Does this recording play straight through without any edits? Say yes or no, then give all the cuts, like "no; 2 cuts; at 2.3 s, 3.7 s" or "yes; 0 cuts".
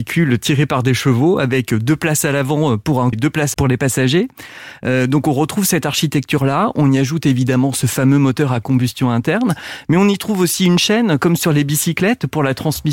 no; 2 cuts; at 3.1 s, 3.5 s